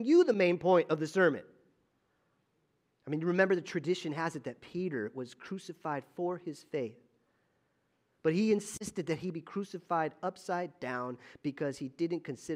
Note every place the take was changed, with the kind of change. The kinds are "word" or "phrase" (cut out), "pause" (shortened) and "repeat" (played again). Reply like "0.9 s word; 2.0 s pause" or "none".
none